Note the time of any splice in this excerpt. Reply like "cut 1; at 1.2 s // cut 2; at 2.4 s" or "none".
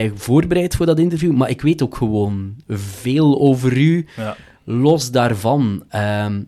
none